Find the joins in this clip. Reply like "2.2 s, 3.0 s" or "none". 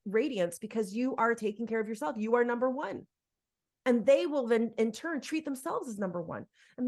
none